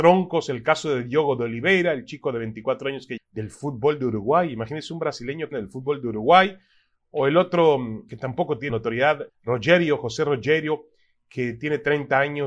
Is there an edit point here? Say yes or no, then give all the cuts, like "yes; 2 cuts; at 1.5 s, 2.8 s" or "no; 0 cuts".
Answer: yes; 5 cuts; at 3.2 s, 5.5 s, 8.1 s, 8.7 s, 9.3 s